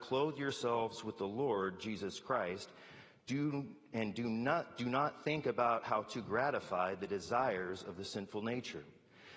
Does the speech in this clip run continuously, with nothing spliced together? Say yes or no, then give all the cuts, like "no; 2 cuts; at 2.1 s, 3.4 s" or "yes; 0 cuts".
yes; 0 cuts